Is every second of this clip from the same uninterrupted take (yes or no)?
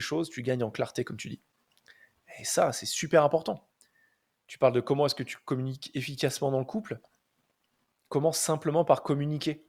yes